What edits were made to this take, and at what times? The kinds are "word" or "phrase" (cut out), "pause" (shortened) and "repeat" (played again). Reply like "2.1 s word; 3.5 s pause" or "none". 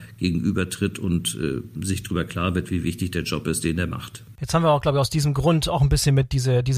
none

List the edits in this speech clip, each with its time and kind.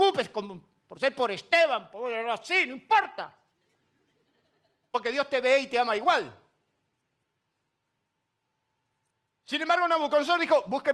none

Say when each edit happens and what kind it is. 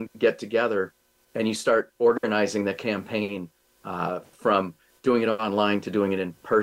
none

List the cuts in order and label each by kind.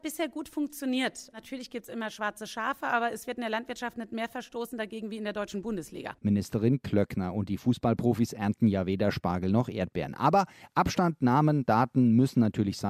none

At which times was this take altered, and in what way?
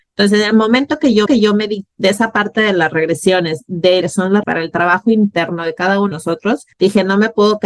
1.3 s repeat; 1.9 s word; 4.0 s phrase; 4.4 s word; 6.1 s word; 6.7 s pause

